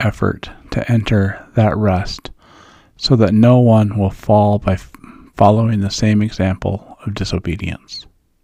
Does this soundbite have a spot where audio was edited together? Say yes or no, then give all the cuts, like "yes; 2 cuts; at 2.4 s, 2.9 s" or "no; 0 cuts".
no; 0 cuts